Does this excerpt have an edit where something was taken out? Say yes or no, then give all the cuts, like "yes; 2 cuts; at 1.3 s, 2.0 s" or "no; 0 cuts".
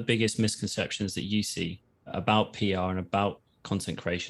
no; 0 cuts